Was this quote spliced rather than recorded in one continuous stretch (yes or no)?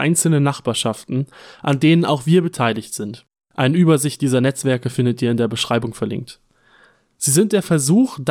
no